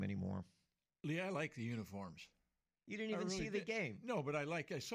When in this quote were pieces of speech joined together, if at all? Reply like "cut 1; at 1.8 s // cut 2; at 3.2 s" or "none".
none